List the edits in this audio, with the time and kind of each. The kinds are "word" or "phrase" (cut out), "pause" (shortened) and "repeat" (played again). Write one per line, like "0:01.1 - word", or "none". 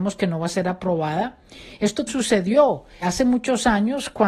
0:02.1 - word
0:03.0 - word